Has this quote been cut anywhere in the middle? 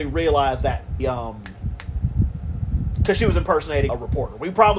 yes; 2 cuts; at 1.0 s, 3.9 s

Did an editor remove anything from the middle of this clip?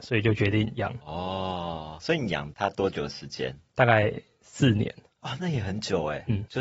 no; 0 cuts

